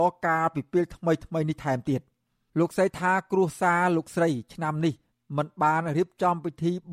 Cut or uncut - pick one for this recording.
uncut